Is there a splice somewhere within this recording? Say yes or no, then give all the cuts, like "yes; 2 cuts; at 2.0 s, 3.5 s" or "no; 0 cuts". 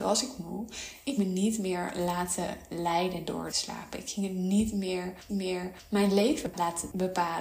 yes; 3 cuts; at 1.2 s, 3.5 s, 5.3 s